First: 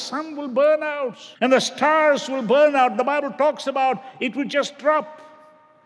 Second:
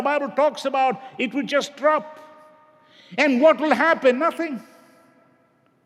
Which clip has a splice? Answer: first; 1 cut; at 1.3 s

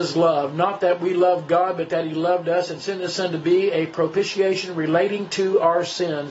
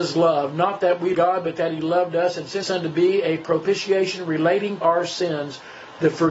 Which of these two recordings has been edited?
second; 3 cuts; at 1.1 s, 2.6 s, 4.8 s

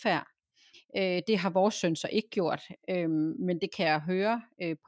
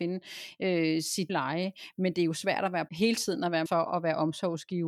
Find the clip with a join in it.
second; 3 cuts; at 1.3 s, 2.9 s, 3.7 s

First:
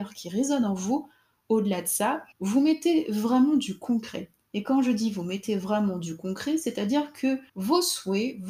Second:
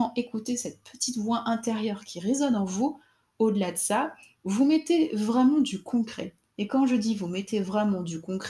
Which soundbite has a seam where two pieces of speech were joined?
first; 2 cuts; at 2.3 s, 7.5 s

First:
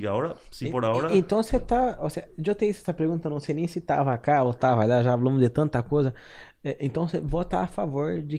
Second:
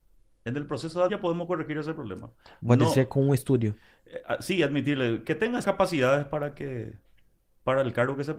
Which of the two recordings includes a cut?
second; 3 cuts; at 1.1 s, 5.2 s, 5.6 s

